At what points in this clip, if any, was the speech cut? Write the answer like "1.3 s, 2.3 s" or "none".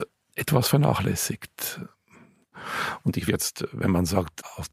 3.3 s